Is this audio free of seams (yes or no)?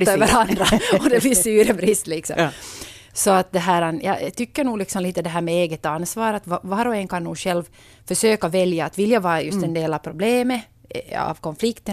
yes